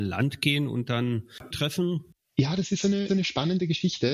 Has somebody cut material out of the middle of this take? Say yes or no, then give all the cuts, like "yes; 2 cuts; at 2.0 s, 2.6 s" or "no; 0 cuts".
yes; 2 cuts; at 1.5 s, 3.1 s